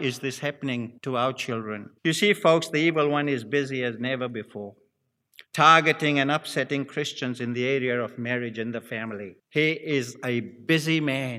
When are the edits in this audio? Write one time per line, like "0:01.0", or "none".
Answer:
0:01.0
0:02.0
0:05.5
0:09.4